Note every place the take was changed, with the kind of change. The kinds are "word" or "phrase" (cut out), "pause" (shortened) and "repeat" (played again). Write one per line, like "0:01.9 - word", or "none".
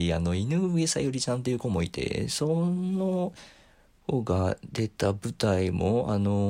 none